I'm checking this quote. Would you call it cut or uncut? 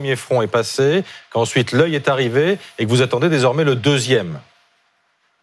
uncut